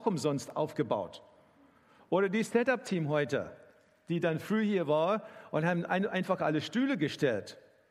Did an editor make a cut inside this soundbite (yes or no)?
no